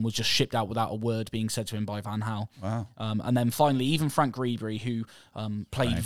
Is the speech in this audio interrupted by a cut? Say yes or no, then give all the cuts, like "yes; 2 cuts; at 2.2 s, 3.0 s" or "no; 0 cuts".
no; 0 cuts